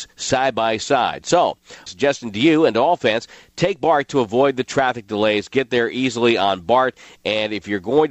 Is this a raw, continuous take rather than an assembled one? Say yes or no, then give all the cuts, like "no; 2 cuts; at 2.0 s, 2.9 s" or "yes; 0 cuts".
no; 1 cut; at 1.9 s